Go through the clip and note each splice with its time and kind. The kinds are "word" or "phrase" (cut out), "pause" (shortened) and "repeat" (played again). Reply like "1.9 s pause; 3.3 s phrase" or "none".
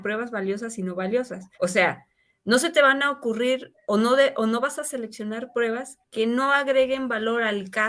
1.5 s pause